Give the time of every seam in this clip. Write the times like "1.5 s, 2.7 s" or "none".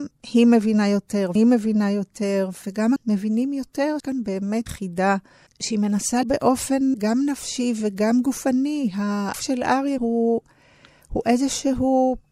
1.4 s, 2.6 s, 3.0 s, 4.0 s, 4.7 s, 6.2 s, 6.9 s, 9.3 s, 10.0 s